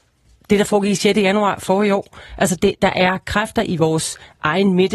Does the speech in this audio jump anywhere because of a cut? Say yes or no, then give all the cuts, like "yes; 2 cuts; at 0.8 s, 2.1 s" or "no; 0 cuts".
no; 0 cuts